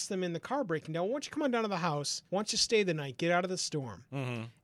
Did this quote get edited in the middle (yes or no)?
yes